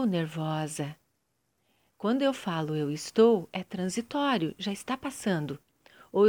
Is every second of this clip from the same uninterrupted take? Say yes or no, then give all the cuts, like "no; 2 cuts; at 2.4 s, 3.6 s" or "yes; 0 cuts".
yes; 0 cuts